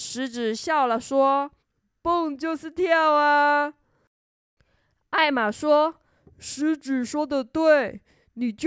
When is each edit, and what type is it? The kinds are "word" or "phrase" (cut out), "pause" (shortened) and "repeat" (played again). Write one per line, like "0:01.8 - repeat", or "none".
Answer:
0:01.6 - pause